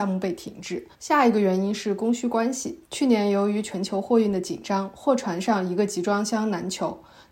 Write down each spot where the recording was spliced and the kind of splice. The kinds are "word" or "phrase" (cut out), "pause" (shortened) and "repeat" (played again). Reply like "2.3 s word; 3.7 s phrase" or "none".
0.9 s pause; 2.8 s pause